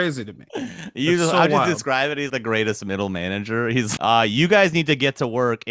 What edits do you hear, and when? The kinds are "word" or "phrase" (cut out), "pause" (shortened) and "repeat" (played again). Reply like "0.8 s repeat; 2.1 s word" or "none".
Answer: 2.3 s word; 4.0 s word

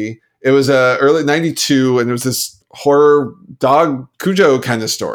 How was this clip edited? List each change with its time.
2.6 s word; 4.1 s pause

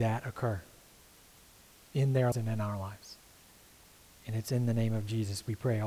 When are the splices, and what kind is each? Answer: 2.3 s word

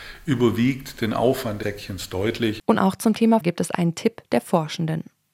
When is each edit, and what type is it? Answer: 1.6 s phrase; 3.4 s word

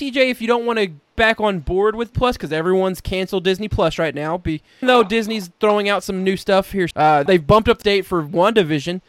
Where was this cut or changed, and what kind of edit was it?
1.2 s word; 2.1 s word; 4.8 s word; 6.9 s word; 7.3 s word; 7.8 s word

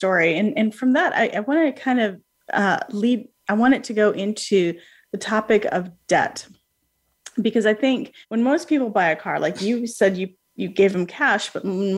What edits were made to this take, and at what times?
8.2 s pause

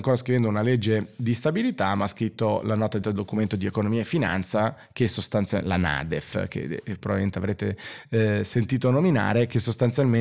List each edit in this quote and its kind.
3.0 s word

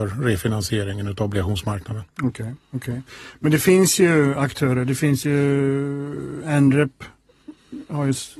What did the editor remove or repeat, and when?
2.1 s pause

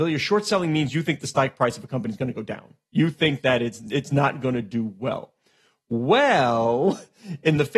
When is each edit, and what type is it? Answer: none

